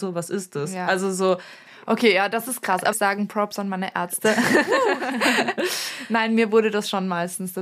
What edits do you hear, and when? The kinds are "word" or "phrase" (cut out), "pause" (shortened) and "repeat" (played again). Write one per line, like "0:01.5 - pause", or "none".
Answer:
0:02.9 - phrase

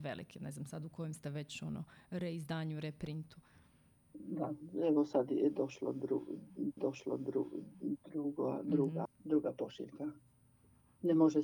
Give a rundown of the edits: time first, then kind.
0:06.8 - repeat
0:09.1 - word

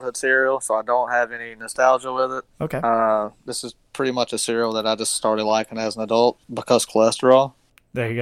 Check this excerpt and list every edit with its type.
0:06.4 - pause

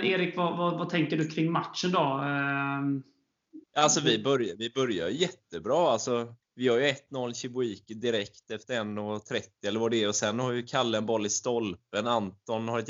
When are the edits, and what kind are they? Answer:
0:03.6 - pause
0:06.4 - pause

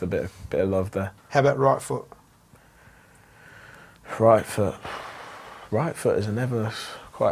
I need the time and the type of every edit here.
0:01.2 - pause

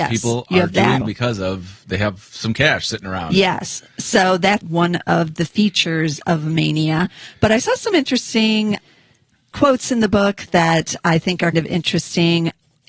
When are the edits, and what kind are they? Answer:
0:01.0 - word
0:04.6 - word
0:09.5 - word
0:11.5 - word

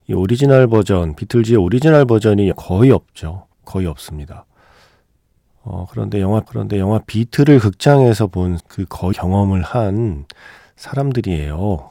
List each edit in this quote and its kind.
0:02.5 - phrase
0:03.5 - pause
0:06.5 - repeat
0:08.6 - word
0:09.1 - word

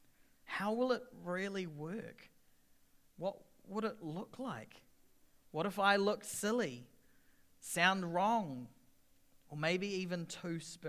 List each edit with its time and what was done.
none

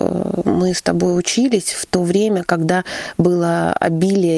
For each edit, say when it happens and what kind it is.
none

